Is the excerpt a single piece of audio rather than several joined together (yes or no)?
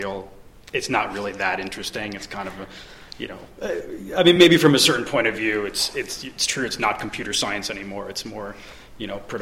yes